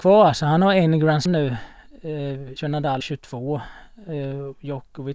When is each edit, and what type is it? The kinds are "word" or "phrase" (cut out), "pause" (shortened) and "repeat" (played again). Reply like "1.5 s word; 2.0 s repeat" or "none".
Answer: 1.3 s word; 2.6 s word; 3.0 s word